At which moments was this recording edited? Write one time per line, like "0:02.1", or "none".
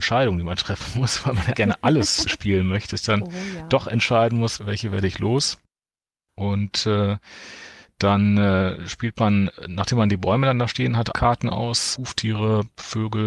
0:01.5
0:02.3
0:02.9
0:04.6
0:11.1
0:12.0